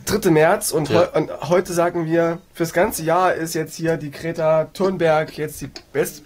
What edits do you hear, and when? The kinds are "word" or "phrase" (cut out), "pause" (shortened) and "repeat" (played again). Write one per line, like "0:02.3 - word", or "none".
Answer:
0:02.4 - pause

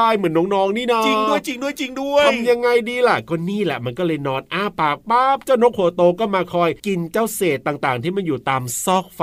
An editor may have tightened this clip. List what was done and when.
0:06.8 - pause

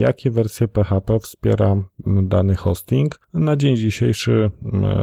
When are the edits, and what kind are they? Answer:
none

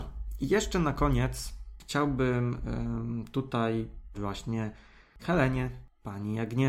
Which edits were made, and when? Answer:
0:04.1 - word
0:05.2 - word

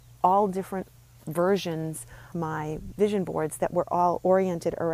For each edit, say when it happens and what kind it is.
0:02.3 - word

